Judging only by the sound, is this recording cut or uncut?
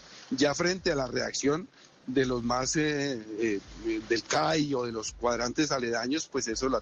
uncut